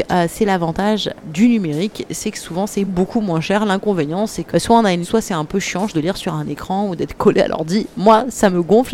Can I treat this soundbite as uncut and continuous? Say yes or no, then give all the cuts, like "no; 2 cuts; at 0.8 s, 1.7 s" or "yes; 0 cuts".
no; 5 cuts; at 1.2 s, 2.8 s, 4.5 s, 5.0 s, 5.9 s